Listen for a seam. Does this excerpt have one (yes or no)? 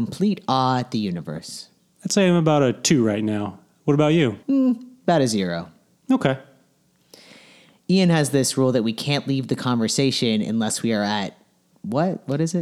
yes